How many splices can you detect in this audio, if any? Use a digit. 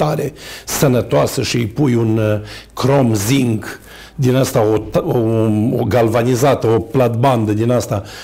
0